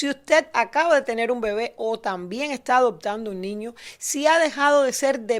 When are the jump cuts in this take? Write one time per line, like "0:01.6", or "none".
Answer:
none